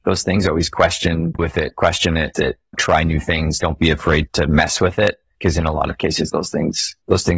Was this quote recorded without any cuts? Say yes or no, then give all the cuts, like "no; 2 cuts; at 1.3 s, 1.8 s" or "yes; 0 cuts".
no; 2 cuts; at 1.4 s, 2.3 s